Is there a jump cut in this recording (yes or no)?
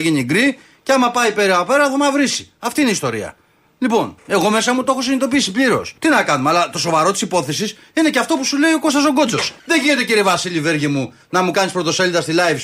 yes